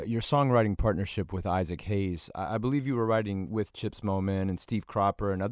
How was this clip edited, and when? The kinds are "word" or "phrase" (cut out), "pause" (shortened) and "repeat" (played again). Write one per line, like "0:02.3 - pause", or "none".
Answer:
none